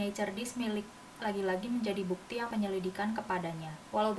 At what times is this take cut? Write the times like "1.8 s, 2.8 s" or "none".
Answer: 1.2 s, 2.5 s